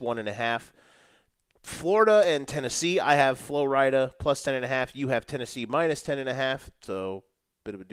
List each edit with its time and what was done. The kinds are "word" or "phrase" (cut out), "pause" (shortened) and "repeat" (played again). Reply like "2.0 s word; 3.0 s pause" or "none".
none